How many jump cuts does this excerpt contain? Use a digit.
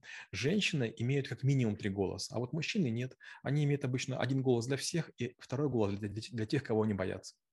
0